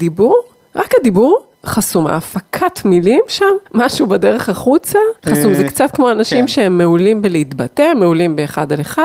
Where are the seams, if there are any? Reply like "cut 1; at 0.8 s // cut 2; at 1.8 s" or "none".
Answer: cut 1; at 1.5 s // cut 2; at 3.7 s // cut 3; at 5.2 s